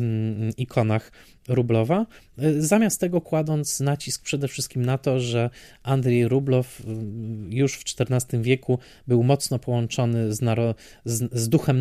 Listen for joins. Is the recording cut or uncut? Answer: uncut